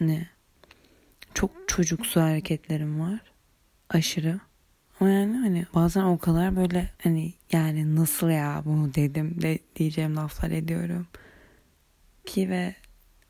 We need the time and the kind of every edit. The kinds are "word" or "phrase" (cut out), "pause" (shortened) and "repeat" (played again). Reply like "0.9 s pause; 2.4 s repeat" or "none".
4.5 s pause; 5.7 s pause; 7.0 s pause